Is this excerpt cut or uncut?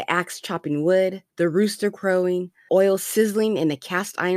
cut